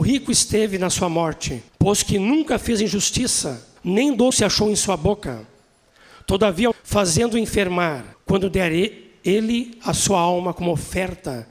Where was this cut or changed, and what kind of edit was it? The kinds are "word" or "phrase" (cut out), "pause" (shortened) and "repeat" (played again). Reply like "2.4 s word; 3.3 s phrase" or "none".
1.7 s pause; 3.8 s pause; 4.3 s word; 6.7 s phrase; 8.1 s pause